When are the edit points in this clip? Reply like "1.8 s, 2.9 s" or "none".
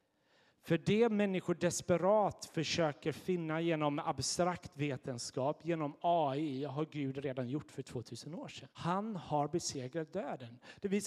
8.7 s